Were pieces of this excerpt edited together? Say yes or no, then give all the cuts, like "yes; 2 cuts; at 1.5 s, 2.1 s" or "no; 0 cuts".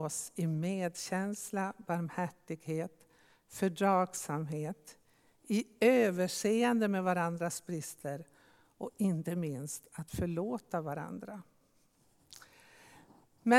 no; 0 cuts